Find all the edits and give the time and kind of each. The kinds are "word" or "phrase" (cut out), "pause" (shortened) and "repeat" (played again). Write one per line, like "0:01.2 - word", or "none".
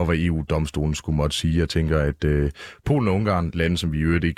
none